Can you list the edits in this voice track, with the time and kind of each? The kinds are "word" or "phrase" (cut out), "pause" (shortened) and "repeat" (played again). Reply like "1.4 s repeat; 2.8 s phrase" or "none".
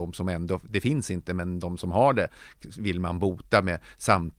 none